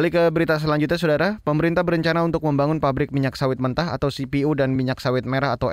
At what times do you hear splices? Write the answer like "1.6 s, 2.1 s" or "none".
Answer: none